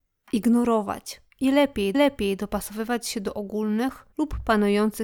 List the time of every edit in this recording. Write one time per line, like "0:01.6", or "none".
0:01.3
0:01.9
0:04.1